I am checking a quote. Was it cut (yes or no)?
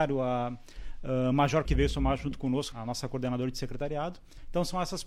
yes